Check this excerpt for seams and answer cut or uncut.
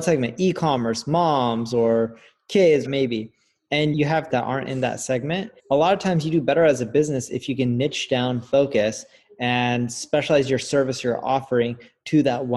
cut